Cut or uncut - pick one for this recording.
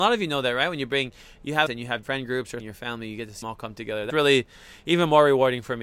cut